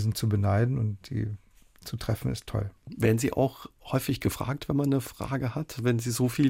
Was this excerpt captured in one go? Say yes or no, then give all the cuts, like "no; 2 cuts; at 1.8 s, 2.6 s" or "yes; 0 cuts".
yes; 0 cuts